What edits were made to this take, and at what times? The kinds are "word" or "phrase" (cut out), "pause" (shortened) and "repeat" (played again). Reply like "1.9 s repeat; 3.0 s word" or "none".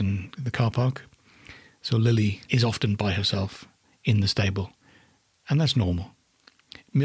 none

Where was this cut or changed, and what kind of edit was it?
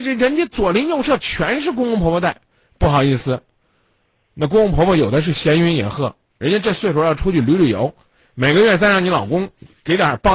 none

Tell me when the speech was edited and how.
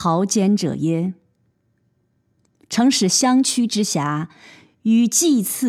none

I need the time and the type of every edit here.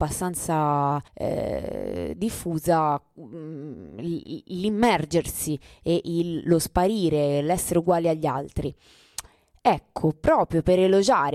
1.1 s pause

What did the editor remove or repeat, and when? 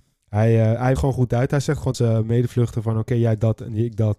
1.0 s phrase; 1.9 s word

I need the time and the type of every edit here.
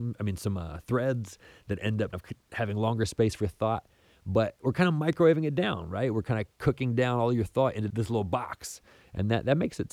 2.1 s word; 7.9 s word

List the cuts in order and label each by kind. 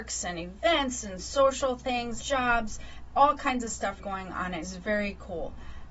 2.2 s word; 4.0 s word; 4.6 s word

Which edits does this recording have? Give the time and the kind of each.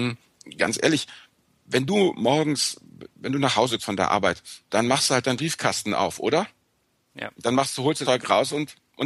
3.8 s word; 4.7 s word; 8.0 s word

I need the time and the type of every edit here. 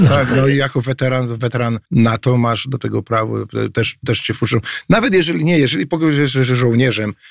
1.9 s pause

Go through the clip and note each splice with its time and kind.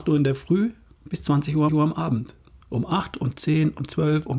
1.7 s repeat

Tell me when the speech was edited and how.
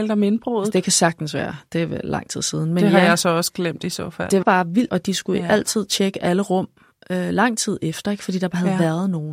4.4 s word; 4.9 s word

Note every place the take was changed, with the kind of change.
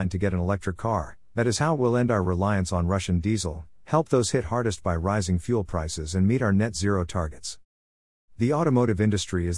none

